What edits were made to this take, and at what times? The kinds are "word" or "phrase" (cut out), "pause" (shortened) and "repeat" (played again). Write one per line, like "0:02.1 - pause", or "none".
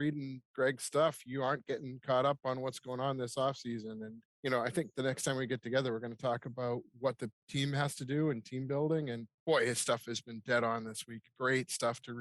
0:04.3 - pause
0:09.4 - pause